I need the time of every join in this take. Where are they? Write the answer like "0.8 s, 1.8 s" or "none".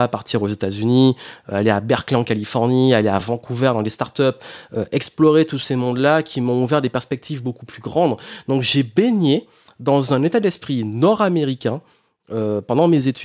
none